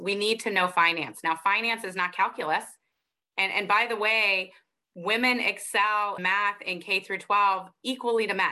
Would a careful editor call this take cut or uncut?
cut